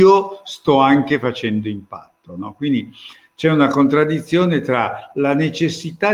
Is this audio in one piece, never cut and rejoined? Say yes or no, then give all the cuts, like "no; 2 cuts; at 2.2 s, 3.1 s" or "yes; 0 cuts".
yes; 0 cuts